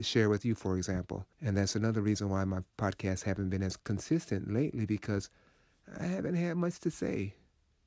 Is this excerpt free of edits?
no; 1 cut; at 1.3 s

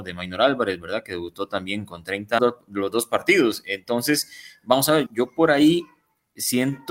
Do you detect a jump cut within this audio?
yes; 2 cuts; at 2.4 s, 5.1 s

